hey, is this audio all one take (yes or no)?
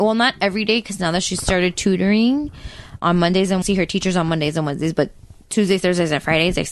no